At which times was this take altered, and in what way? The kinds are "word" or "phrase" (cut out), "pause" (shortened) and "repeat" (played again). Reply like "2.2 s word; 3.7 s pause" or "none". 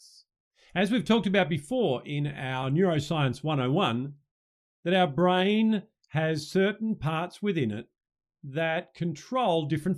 none